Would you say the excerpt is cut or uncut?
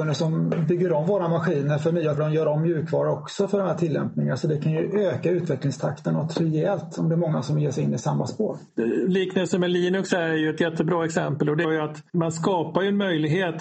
cut